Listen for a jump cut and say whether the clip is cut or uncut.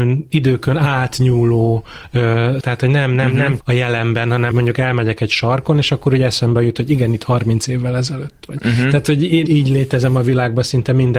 cut